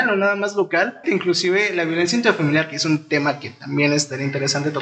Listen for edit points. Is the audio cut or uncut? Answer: cut